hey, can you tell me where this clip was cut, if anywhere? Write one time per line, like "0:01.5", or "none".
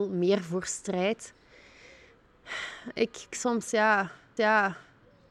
0:03.3
0:04.4